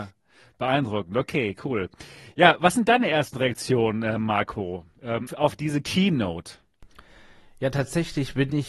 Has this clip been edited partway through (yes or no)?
yes